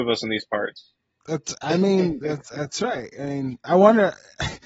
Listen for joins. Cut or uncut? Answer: uncut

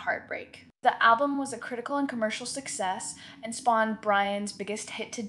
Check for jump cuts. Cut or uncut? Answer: uncut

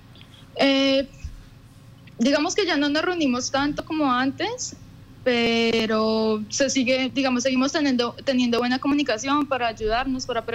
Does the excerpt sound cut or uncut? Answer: uncut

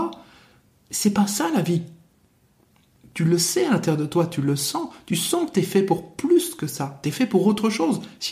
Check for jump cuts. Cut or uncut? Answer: uncut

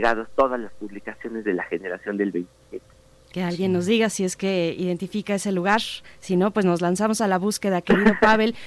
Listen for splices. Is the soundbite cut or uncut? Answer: uncut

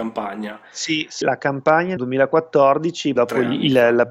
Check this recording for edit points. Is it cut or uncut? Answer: cut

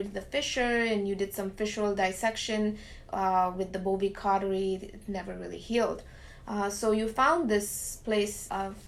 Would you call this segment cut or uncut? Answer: uncut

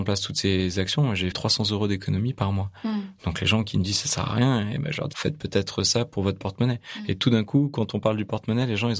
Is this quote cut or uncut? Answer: cut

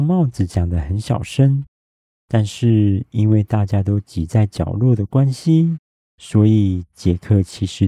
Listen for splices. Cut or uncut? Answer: uncut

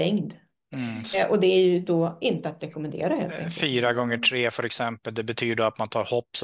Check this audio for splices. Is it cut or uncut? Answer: cut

